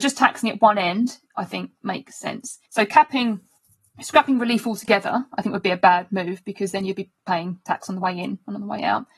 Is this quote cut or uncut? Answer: cut